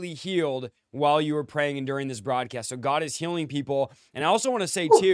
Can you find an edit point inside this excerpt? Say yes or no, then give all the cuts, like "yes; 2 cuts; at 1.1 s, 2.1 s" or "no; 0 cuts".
no; 0 cuts